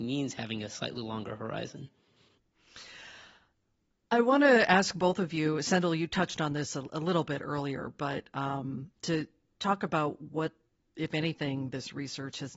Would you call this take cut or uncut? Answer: uncut